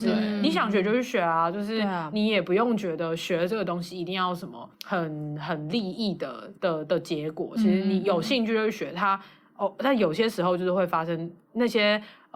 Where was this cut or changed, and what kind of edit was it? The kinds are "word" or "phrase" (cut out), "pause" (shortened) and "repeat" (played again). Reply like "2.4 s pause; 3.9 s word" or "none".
4.7 s pause; 6.6 s pause